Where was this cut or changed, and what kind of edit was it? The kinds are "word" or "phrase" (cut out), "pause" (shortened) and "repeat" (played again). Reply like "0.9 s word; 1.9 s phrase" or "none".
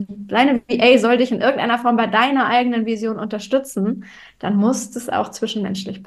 none